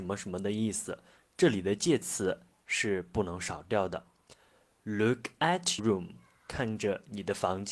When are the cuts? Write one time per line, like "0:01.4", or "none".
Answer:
0:02.6
0:05.8